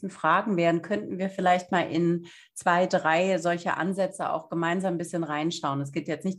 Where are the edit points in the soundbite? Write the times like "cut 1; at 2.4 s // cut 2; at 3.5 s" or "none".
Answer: none